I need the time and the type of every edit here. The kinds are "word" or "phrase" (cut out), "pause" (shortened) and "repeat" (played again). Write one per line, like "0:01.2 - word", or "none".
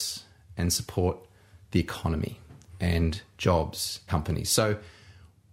0:04.1 - word